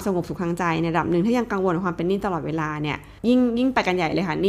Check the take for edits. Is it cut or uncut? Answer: cut